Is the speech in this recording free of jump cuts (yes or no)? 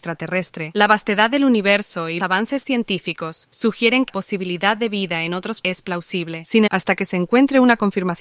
no